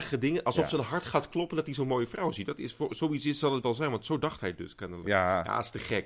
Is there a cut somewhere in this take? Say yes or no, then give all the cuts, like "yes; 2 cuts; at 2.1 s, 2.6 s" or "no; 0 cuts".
no; 0 cuts